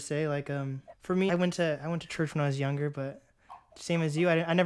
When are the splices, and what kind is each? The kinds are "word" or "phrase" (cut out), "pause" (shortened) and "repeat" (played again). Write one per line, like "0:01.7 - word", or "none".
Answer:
0:00.9 - pause
0:01.3 - word